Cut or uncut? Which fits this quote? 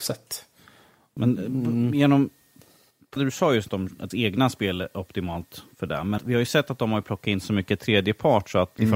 cut